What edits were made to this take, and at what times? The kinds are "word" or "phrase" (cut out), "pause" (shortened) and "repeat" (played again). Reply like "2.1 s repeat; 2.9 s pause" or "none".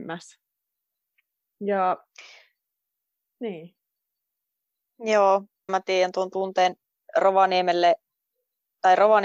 5.7 s word

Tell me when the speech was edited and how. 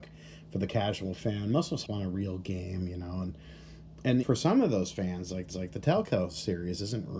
1.9 s phrase; 4.2 s word; 5.5 s repeat

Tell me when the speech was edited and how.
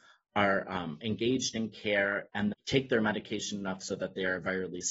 2.5 s word

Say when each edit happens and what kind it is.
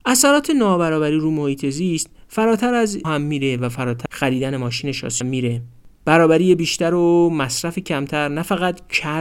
3.0 s word; 4.1 s word; 5.2 s phrase

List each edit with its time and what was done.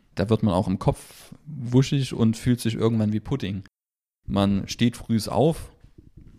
none

